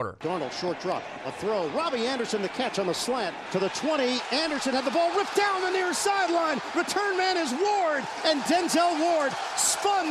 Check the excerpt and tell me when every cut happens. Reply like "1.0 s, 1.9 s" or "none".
5.3 s